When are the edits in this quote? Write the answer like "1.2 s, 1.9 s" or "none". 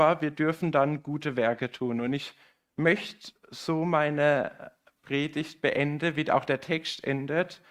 none